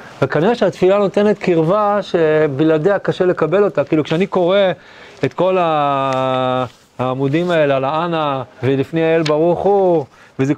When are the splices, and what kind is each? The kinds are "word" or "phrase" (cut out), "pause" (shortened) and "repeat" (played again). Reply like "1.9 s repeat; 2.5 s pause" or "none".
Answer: 8.5 s pause